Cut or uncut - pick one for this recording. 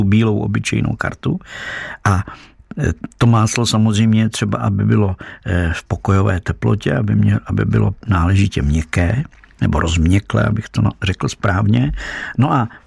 uncut